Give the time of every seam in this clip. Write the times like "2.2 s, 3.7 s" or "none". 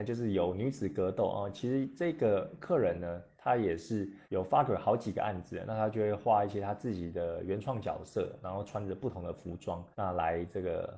4.2 s, 9.9 s